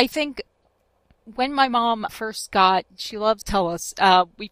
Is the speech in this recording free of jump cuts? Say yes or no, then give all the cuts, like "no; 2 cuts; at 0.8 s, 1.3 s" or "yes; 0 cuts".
no; 2 cuts; at 2.1 s, 3.4 s